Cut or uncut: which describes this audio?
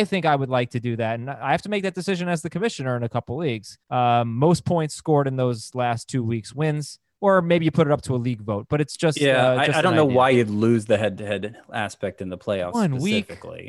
cut